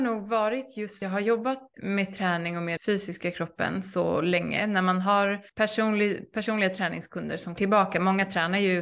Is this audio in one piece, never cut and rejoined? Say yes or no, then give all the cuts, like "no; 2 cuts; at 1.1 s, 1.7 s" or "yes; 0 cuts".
no; 5 cuts; at 1.0 s, 1.7 s, 2.8 s, 5.5 s, 7.6 s